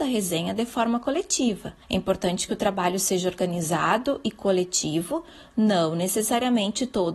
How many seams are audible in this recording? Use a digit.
1